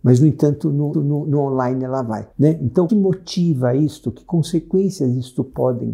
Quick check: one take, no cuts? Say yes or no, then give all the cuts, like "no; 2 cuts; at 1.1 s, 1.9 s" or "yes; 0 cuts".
no; 3 cuts; at 0.9 s, 2.3 s, 2.9 s